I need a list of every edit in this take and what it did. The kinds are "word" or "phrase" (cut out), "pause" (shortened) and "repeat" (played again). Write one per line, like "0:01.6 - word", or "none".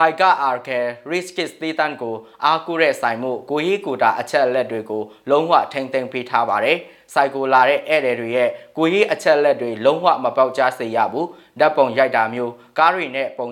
none